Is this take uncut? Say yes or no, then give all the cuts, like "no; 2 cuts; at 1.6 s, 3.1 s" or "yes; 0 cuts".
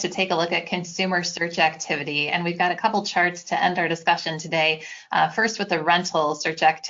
yes; 0 cuts